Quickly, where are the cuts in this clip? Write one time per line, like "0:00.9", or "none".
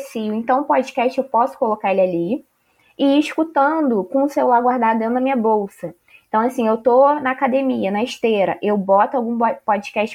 none

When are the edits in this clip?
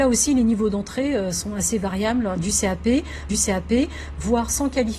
0:03.3

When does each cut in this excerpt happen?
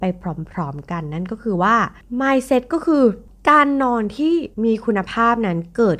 0:04.5

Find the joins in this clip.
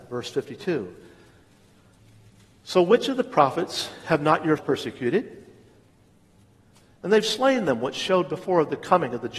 0:04.6

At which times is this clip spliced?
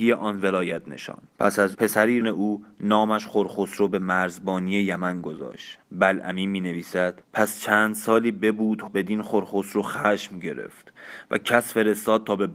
0:01.3
0:01.7
0:02.2
0:05.8
0:07.2
0:08.9

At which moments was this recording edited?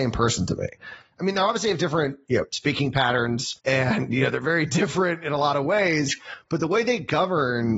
0:03.6

